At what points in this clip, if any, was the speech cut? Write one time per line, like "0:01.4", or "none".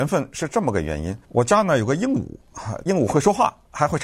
0:01.2
0:02.9